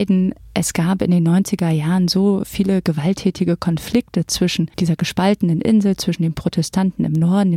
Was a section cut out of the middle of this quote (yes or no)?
yes